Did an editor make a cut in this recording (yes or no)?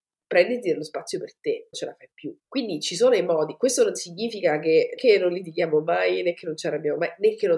yes